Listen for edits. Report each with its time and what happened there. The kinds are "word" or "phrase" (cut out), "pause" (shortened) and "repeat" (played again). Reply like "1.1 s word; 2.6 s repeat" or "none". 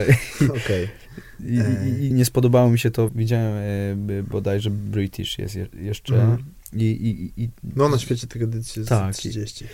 2.1 s word; 3.1 s phrase